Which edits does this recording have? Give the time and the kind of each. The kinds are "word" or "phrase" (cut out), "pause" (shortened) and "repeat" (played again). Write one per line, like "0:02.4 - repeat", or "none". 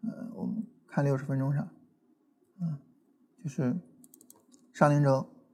0:02.9 - pause